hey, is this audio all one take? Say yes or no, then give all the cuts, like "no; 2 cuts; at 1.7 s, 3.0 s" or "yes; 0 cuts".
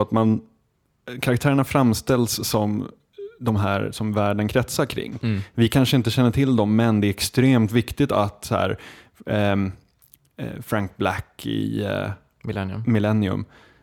yes; 0 cuts